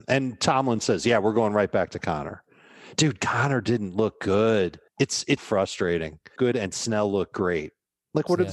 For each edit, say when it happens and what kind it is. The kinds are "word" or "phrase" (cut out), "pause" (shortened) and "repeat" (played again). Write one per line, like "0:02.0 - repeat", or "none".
0:04.9 - pause
0:05.4 - word
0:06.4 - phrase